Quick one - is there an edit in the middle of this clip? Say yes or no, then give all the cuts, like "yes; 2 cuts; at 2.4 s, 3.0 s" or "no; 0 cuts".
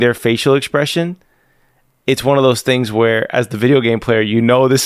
no; 0 cuts